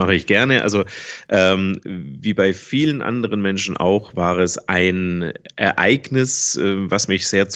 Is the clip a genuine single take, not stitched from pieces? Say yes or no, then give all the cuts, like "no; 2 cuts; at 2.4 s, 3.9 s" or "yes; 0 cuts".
yes; 0 cuts